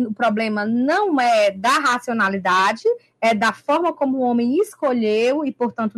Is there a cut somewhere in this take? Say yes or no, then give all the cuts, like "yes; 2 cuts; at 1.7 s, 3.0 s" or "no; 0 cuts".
no; 0 cuts